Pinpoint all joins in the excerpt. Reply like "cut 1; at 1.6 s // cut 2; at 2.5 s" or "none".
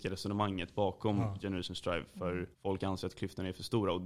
cut 1; at 2.5 s